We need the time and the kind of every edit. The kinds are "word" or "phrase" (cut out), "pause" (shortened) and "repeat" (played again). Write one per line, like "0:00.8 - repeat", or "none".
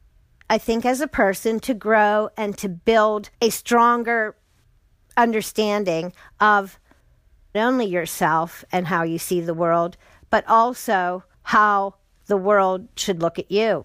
0:03.3 - pause
0:07.5 - word
0:11.3 - pause